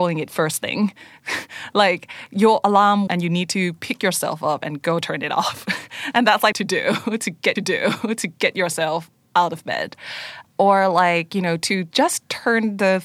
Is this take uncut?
no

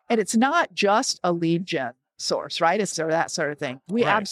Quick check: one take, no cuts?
no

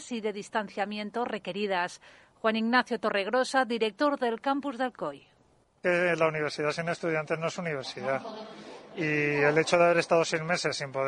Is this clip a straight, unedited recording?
yes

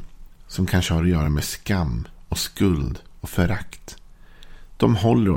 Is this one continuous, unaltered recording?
yes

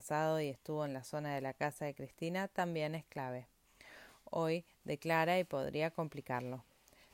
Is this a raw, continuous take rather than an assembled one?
yes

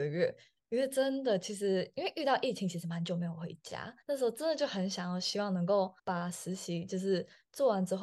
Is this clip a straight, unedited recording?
no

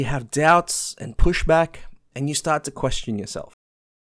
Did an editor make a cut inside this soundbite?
no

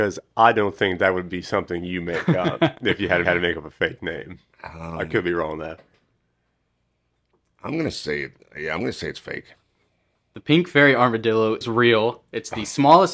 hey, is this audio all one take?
no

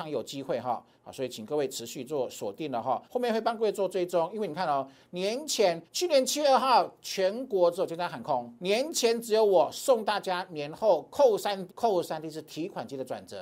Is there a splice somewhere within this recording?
yes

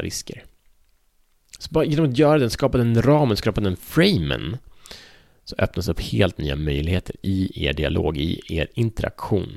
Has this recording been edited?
no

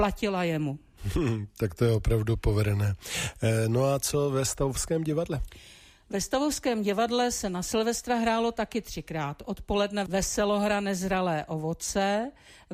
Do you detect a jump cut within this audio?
no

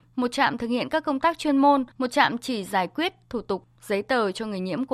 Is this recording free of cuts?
no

